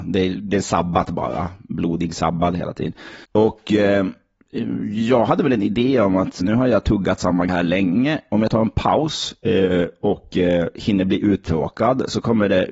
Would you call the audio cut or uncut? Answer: cut